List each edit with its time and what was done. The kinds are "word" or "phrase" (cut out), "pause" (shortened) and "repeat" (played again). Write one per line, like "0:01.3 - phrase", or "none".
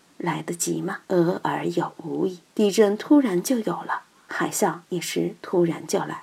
0:01.0 - pause
0:02.5 - pause
0:04.8 - pause